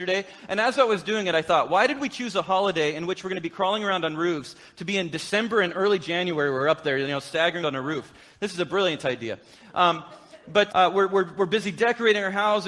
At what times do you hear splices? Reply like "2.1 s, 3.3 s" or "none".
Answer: 7.6 s, 10.7 s

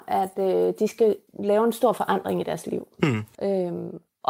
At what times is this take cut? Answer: 1.3 s, 3.3 s

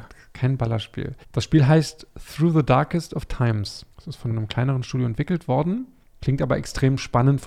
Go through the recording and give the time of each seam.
1.2 s, 3.9 s, 4.3 s

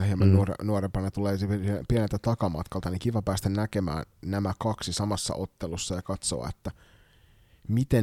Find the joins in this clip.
none

